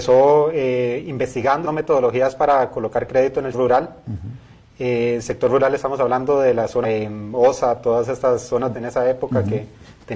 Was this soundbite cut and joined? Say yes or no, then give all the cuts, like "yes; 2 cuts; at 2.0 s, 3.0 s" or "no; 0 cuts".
yes; 4 cuts; at 1.6 s, 3.5 s, 6.8 s, 8.7 s